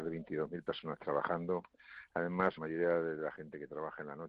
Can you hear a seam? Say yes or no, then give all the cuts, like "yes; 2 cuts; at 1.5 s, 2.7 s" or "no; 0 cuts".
yes; 1 cut; at 2.6 s